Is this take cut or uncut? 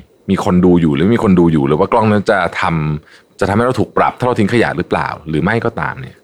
uncut